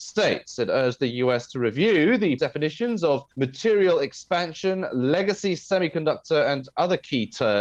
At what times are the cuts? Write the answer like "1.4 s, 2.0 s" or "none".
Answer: 2.4 s, 3.3 s